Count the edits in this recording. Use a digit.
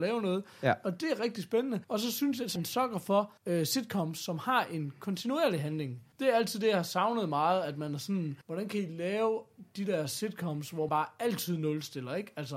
6